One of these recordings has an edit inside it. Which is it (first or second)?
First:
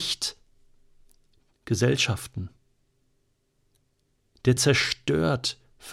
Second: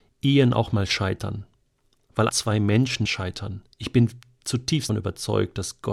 second